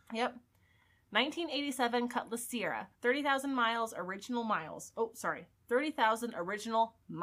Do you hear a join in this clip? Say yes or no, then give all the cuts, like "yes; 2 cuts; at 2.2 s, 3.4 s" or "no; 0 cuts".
yes; 1 cut; at 2.9 s